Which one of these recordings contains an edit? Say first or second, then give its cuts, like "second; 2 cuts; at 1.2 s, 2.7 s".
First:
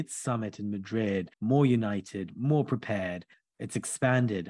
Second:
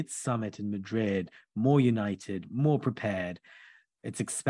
first; 2 cuts; at 1.3 s, 3.3 s